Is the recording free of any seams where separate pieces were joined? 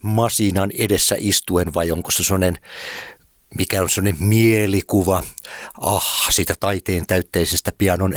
yes; 0 cuts

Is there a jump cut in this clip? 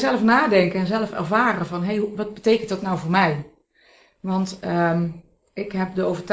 no; 0 cuts

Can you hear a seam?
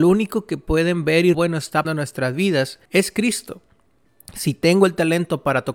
yes; 3 cuts; at 1.3 s, 1.8 s, 2.8 s

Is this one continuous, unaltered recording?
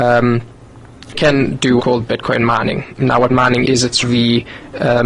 no; 5 cuts; at 1.1 s, 1.8 s, 3.3 s, 3.6 s, 4.0 s

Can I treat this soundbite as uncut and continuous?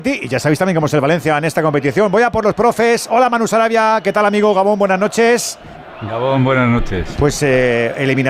yes; 0 cuts

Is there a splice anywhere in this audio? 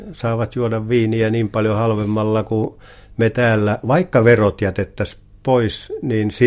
no; 0 cuts

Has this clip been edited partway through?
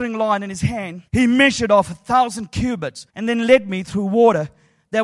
yes; 2 cuts; at 1.1 s, 3.1 s

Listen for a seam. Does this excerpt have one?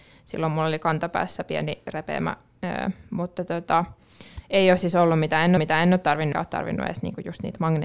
yes; 2 cuts; at 5.6 s, 6.3 s

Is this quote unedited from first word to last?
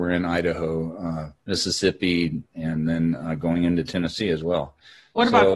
no; 1 cut; at 1.4 s

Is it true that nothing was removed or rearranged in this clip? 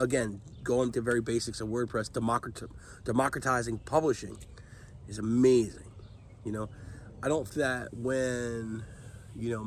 no; 2 cuts; at 0.9 s, 7.5 s

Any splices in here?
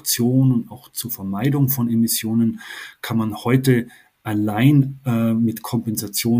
no; 0 cuts

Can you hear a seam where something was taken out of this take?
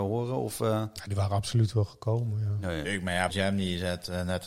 yes; 2 cuts; at 2.8 s, 3.3 s

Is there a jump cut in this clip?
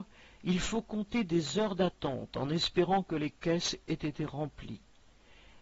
no; 0 cuts

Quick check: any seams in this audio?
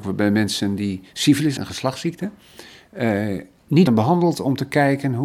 yes; 2 cuts; at 1.6 s, 3.9 s

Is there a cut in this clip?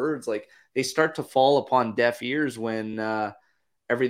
no; 0 cuts

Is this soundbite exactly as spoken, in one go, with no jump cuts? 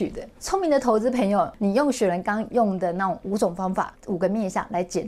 no; 1 cut; at 4.0 s

